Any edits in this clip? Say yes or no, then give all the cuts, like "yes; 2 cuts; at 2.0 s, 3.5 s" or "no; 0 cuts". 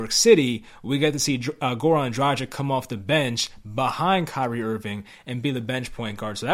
no; 0 cuts